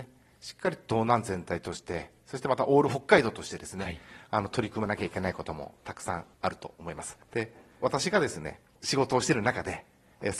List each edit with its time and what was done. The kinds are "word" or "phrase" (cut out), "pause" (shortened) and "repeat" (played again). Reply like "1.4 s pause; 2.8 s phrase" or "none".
6.3 s pause; 7.2 s pause